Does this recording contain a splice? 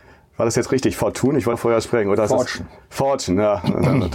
yes; 1 cut; at 1.5 s

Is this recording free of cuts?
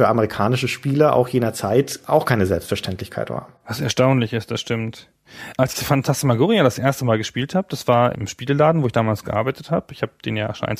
no; 1 cut; at 3.6 s

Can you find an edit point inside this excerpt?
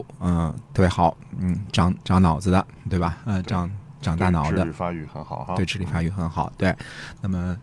no; 0 cuts

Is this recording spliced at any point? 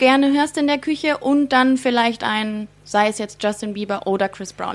no; 0 cuts

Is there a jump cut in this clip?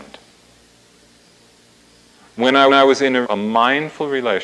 yes; 2 cuts; at 2.7 s, 3.2 s

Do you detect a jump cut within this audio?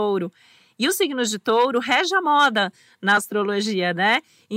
no; 0 cuts

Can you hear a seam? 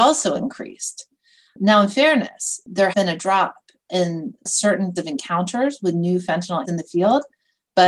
yes; 3 cuts; at 2.9 s, 5.0 s, 6.6 s

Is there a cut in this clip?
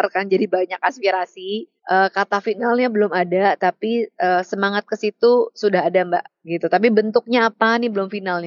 yes; 1 cut; at 1.8 s

